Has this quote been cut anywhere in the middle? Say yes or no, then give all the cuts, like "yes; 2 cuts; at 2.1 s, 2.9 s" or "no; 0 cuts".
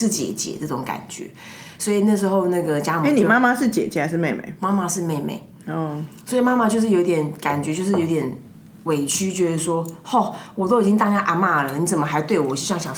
no; 0 cuts